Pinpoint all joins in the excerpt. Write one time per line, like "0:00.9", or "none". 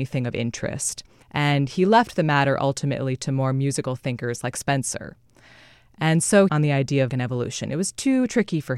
0:01.2
0:06.5
0:07.1